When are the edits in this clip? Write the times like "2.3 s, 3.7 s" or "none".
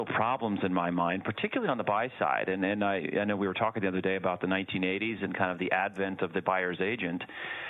none